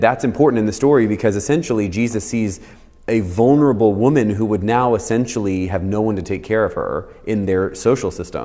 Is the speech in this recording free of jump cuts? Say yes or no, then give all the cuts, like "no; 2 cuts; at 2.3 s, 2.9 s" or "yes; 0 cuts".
yes; 0 cuts